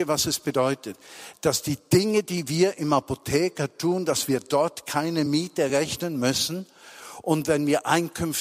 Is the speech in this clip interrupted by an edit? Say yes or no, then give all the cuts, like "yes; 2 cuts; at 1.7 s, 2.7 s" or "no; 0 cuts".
no; 0 cuts